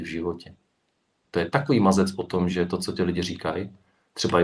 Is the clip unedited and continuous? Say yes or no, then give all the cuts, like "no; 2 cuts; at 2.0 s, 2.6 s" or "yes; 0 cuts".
yes; 0 cuts